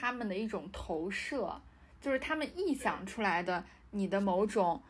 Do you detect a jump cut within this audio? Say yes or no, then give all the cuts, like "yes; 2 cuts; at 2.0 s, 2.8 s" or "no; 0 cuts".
no; 0 cuts